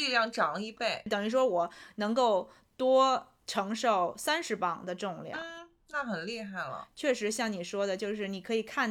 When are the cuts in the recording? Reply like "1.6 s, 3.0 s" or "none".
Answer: 3.4 s